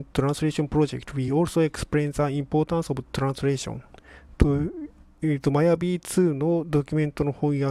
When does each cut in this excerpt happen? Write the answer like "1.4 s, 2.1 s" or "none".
none